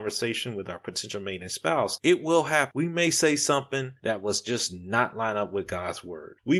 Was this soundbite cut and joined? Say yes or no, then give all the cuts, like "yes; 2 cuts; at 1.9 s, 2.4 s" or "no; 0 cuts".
no; 0 cuts